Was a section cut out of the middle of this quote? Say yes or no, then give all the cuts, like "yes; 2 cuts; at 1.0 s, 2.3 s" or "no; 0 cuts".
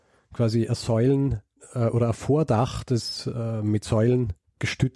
no; 0 cuts